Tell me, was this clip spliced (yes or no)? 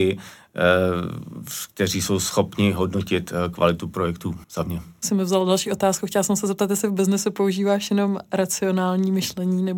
yes